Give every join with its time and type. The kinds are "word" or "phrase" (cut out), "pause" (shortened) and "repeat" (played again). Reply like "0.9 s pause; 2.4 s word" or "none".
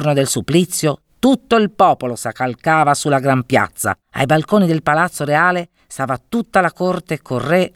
4.0 s pause